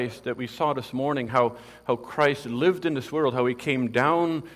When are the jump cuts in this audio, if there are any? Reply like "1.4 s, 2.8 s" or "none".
none